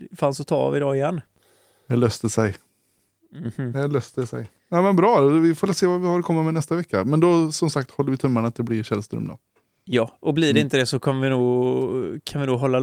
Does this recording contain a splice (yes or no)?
no